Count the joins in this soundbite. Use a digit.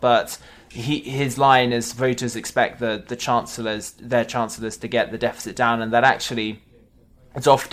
0